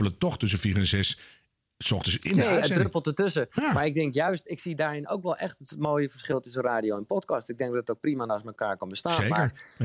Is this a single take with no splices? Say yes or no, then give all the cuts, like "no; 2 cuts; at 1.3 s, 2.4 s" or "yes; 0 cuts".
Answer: yes; 0 cuts